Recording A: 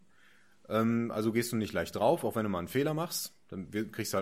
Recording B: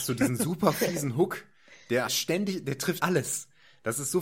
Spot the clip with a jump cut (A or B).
B